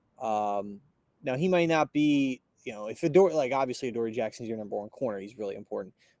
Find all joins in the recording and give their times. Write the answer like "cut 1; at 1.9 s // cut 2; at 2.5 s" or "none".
cut 1; at 1.0 s // cut 2; at 2.5 s